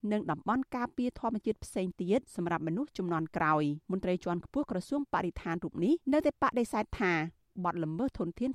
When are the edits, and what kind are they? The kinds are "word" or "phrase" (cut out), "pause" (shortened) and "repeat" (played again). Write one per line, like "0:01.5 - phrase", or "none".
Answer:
0:02.3 - pause
0:03.8 - pause
0:06.0 - pause